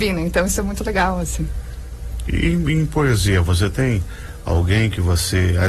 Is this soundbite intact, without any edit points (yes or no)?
yes